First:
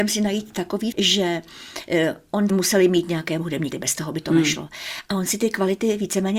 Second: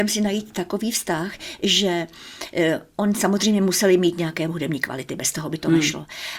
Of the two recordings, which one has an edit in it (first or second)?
first